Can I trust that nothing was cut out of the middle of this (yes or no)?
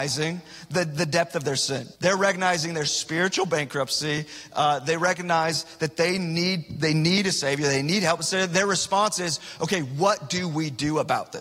no